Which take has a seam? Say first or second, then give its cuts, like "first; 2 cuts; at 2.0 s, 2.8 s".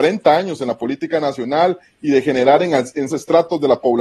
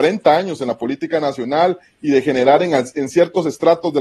first; 1 cut; at 3.1 s